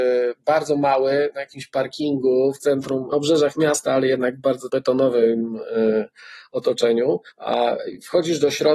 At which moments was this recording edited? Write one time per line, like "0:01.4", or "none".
0:03.1
0:04.7
0:07.3